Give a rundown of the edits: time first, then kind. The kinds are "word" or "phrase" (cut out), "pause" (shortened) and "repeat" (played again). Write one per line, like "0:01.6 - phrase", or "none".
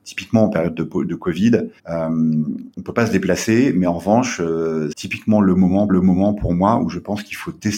0:01.8 - pause
0:02.7 - pause
0:04.9 - word
0:05.9 - repeat